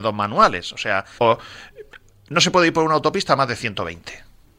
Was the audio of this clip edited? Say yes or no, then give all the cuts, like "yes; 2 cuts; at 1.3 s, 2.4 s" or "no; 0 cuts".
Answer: yes; 1 cut; at 1.2 s